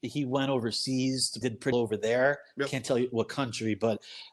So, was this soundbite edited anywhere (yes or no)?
yes